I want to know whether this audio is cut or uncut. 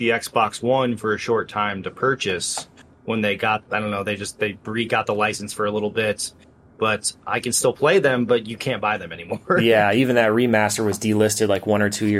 uncut